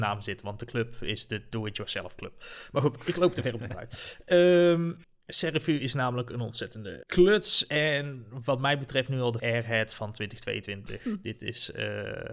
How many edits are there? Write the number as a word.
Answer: four